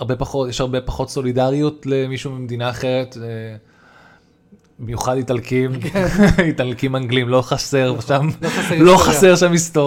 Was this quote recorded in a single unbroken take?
yes; 0 cuts

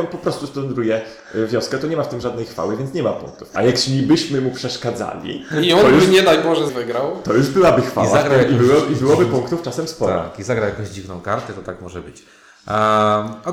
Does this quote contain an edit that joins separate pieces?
yes; 1 cut; at 6.7 s

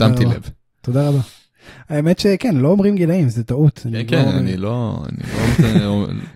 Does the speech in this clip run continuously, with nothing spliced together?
yes; 0 cuts

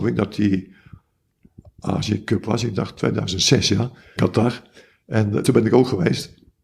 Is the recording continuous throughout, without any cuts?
no; 2 cuts; at 4.2 s, 5.4 s

